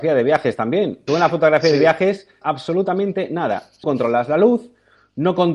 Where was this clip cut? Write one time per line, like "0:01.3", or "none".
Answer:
0:01.1
0:02.4
0:03.8